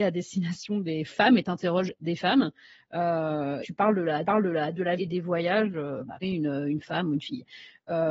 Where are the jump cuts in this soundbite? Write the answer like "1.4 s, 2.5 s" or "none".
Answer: 3.6 s, 4.2 s, 5.0 s, 6.2 s

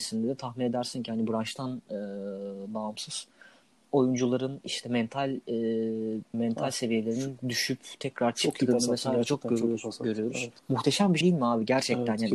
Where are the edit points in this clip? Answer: 6.3 s, 10.6 s, 11.2 s

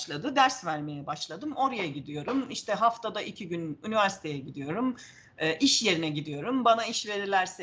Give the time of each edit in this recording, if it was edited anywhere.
none

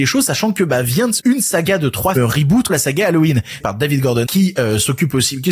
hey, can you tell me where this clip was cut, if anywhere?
1.2 s, 2.1 s, 2.7 s, 3.6 s, 4.2 s

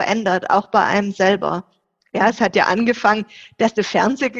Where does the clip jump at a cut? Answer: none

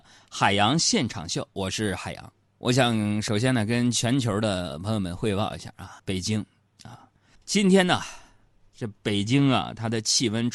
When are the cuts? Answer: 2.5 s, 6.0 s, 7.4 s

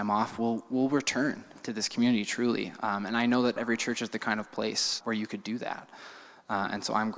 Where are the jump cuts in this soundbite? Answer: 3.6 s, 5.0 s

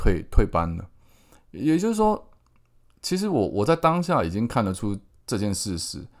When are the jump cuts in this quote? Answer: none

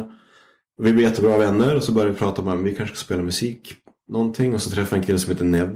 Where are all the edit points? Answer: none

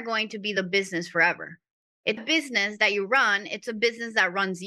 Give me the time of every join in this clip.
2.2 s

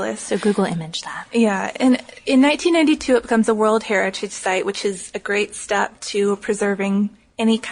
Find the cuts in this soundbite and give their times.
none

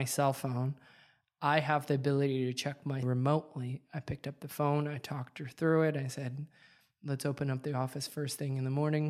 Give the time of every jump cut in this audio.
3.0 s

